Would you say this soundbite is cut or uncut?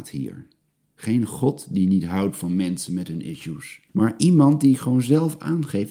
cut